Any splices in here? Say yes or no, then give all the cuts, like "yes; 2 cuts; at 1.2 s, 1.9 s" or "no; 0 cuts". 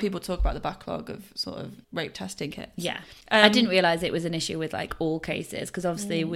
yes; 2 cuts; at 1.8 s, 3.2 s